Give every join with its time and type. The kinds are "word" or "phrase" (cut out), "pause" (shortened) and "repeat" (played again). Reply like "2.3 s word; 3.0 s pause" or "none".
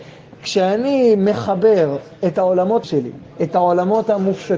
2.8 s word; 3.3 s pause